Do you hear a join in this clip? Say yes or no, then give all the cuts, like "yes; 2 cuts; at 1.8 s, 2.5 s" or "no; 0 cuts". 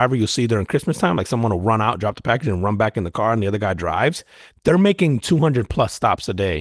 no; 0 cuts